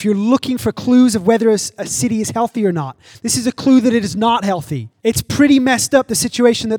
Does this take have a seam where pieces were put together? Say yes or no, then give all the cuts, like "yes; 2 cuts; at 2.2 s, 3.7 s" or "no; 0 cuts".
yes; 1 cut; at 5.0 s